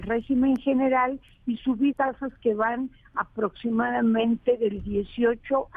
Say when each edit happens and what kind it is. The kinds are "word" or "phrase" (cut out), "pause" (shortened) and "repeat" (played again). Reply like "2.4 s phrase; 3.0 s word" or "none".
1.9 s word